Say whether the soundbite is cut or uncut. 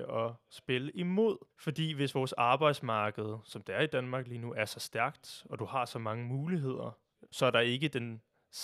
cut